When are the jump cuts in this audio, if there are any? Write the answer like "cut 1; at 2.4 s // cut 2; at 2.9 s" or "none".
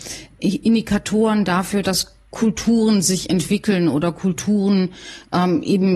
none